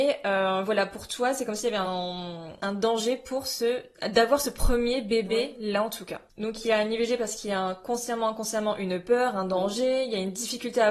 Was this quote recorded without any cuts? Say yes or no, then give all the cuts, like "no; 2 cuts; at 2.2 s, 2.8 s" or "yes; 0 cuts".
yes; 0 cuts